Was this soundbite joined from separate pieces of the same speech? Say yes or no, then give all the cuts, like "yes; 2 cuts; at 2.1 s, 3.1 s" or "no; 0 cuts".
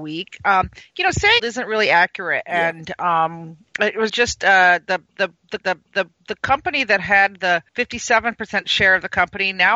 yes; 4 cuts; at 1.4 s, 4.1 s, 5.6 s, 7.7 s